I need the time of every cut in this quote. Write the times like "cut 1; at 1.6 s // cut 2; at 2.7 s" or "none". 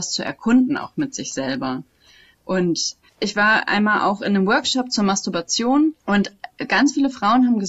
cut 1; at 6.0 s